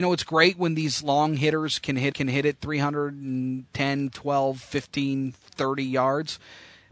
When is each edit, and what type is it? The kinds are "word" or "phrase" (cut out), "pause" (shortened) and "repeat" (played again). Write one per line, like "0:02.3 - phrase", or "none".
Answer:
0:02.1 - repeat

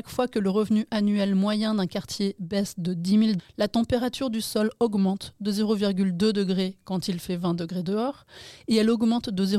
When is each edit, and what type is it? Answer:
0:03.4 - word

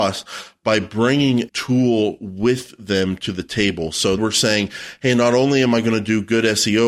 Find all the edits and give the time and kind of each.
0:01.5 - word
0:04.2 - word

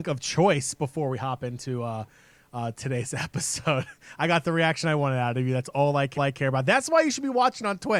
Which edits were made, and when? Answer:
0:06.2 - repeat

